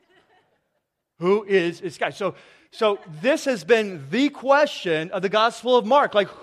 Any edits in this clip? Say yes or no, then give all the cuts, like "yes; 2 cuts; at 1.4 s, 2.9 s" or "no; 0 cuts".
no; 0 cuts